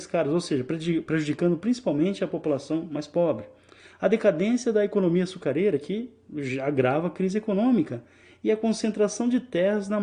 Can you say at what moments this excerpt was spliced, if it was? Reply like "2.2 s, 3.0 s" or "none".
none

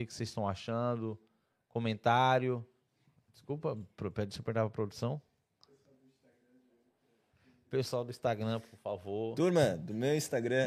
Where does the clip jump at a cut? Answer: none

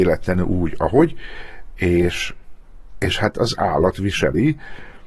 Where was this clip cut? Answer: none

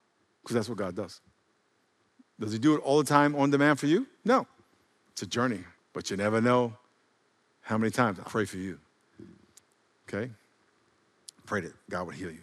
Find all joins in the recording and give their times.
5.8 s, 8.3 s

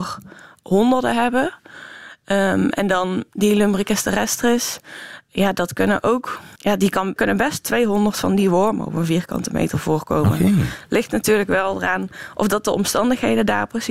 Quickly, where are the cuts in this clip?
6.6 s, 7.2 s

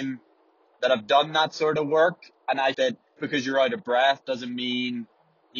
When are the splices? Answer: 2.7 s, 3.2 s

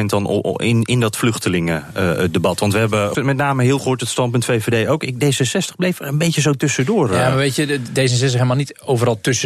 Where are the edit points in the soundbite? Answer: 3.1 s, 3.8 s

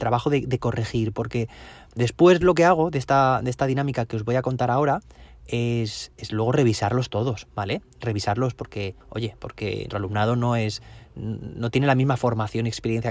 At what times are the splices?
9.0 s, 9.9 s

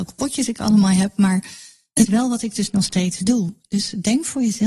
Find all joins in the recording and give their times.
2.1 s

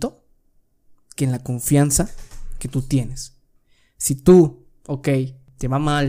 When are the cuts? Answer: none

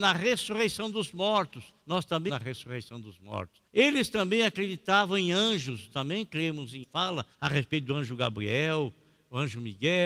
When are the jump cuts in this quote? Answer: 1.8 s, 2.3 s, 3.7 s, 5.9 s, 6.8 s, 7.3 s

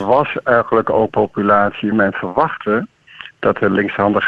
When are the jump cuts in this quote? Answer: 1.1 s, 1.9 s

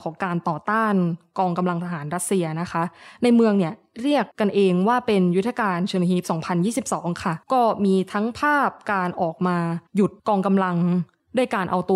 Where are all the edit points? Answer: 4.3 s, 7.4 s, 9.9 s, 10.2 s

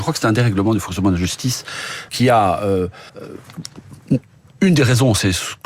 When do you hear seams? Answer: 2.1 s, 3.1 s

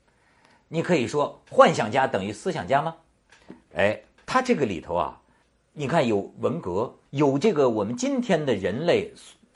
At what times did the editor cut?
4.2 s, 5.4 s, 7.1 s

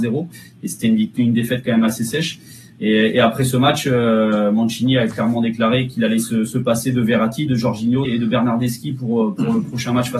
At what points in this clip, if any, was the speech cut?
8.0 s

